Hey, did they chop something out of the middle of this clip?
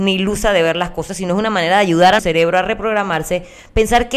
yes; 1 cut; at 2.2 s

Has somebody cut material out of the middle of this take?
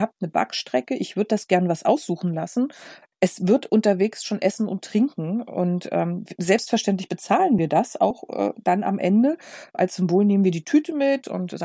no; 0 cuts

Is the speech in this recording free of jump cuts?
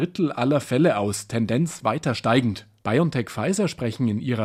yes; 0 cuts

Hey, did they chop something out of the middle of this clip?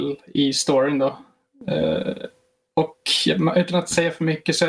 no; 0 cuts

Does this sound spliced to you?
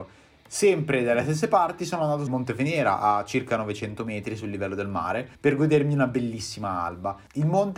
yes; 2 cuts; at 2.3 s, 5.3 s

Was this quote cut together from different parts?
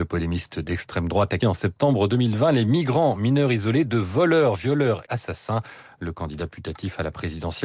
yes; 2 cuts; at 1.4 s, 5.1 s

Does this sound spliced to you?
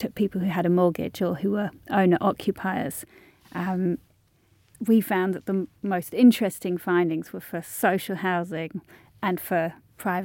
no; 0 cuts

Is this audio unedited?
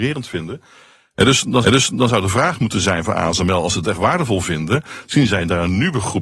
no; 1 cut; at 1.6 s

